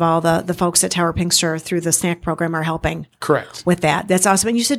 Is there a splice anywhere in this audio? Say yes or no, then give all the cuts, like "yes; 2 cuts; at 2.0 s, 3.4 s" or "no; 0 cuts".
no; 0 cuts